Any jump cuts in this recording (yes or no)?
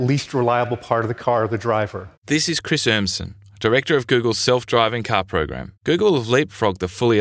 yes